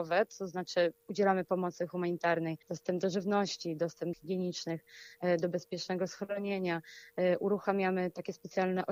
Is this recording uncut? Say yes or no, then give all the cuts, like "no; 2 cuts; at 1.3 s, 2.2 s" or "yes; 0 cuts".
no; 3 cuts; at 1.5 s, 2.6 s, 4.1 s